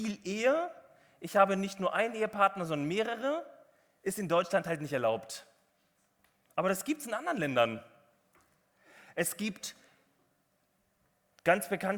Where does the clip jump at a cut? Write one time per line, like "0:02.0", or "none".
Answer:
none